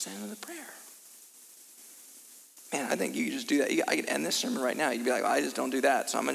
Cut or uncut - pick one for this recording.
uncut